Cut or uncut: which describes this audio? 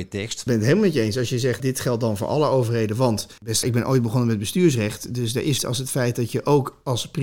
cut